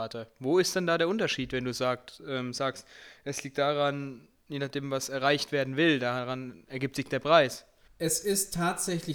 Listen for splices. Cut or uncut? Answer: cut